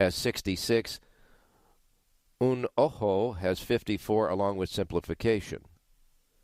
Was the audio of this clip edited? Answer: no; 0 cuts

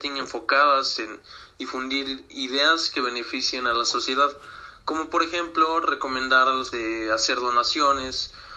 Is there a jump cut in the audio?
yes; 1 cut; at 6.7 s

